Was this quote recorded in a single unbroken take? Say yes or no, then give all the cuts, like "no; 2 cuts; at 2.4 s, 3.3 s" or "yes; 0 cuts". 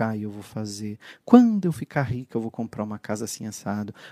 yes; 0 cuts